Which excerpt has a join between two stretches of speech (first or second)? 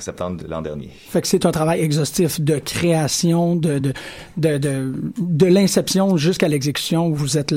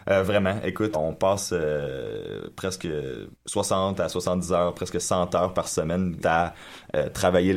second